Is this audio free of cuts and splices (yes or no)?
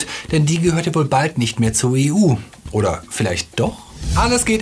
yes